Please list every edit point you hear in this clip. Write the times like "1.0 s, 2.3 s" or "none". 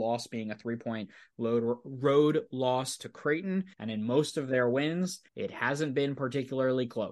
3.7 s, 5.3 s